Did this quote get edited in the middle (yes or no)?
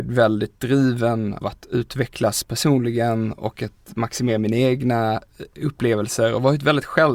yes